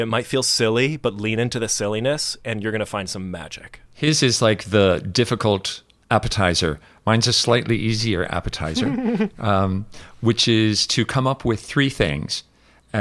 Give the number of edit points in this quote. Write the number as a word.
one